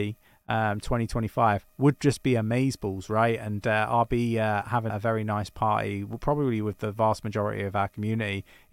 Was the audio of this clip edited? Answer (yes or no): yes